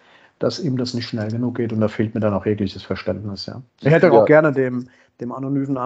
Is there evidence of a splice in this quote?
yes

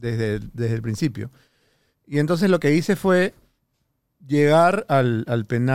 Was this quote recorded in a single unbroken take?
yes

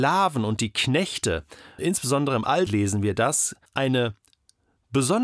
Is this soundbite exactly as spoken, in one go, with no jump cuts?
no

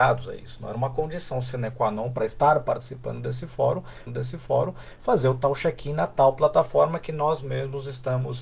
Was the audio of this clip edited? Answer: yes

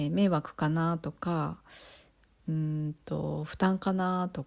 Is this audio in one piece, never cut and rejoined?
yes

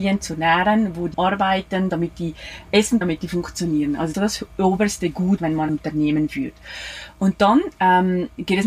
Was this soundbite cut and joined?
yes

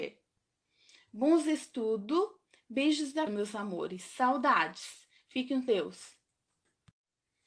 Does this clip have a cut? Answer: yes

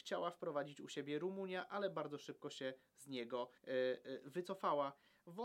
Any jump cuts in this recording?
yes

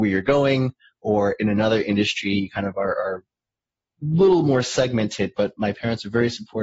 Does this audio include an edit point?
no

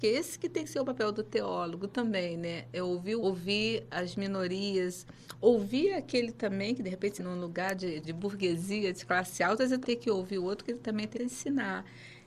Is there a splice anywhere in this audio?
yes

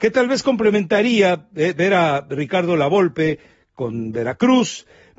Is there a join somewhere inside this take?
no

